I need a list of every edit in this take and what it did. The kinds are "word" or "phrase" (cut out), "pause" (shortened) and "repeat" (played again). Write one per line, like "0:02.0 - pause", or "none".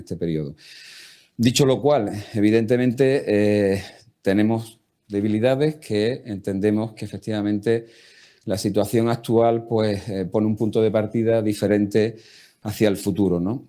none